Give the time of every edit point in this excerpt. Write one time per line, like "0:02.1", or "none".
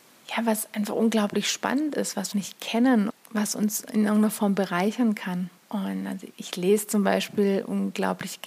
0:02.3
0:03.1
0:05.6
0:06.3